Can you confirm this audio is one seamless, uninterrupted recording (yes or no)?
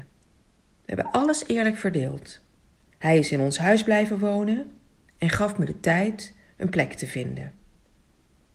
no